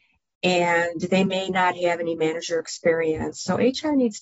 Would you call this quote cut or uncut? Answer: uncut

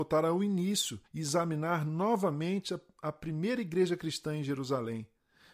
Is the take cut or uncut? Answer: cut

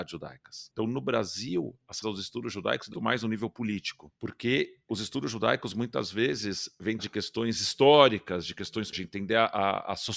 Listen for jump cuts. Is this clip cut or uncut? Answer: cut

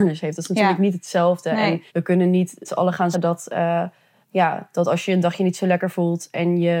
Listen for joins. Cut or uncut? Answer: cut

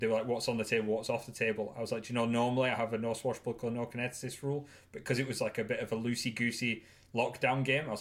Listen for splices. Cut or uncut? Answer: uncut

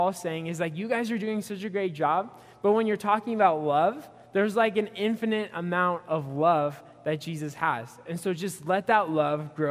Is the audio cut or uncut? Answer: uncut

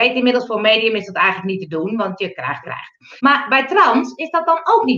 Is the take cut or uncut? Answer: cut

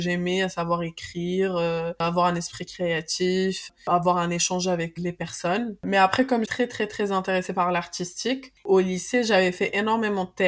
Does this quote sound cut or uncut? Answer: cut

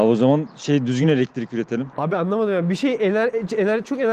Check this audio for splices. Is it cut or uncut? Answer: uncut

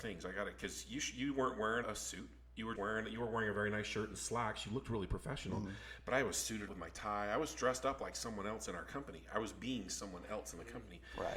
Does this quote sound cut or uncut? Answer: cut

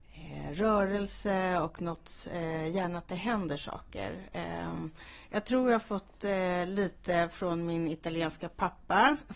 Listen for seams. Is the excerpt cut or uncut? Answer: uncut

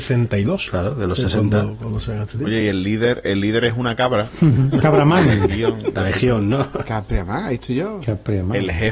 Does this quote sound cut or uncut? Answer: uncut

